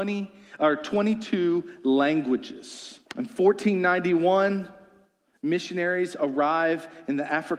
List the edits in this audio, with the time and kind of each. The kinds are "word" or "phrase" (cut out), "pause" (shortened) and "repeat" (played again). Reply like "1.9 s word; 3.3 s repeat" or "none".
3.1 s pause

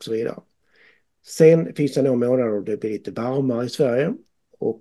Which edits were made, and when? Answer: none

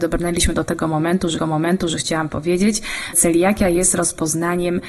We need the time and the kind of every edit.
1.4 s repeat; 3.1 s word

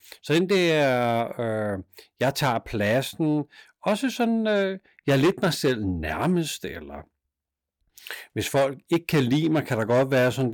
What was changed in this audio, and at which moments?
none

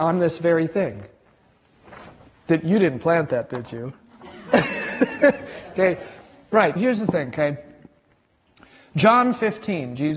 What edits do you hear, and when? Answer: 6.8 s word

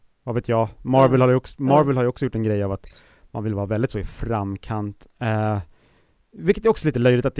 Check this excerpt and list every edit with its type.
none

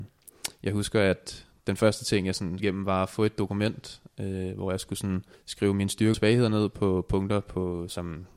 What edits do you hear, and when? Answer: 2.6 s word; 5.3 s pause; 6.1 s word

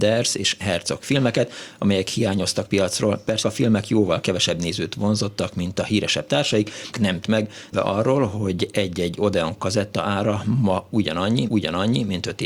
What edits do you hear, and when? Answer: 2.7 s phrase; 3.4 s word; 6.9 s phrase; 7.2 s word; 7.7 s phrase; 11.5 s repeat

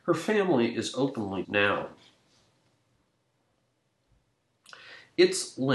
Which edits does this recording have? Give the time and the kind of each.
1.4 s phrase

